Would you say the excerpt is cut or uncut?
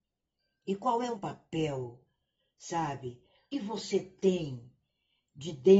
cut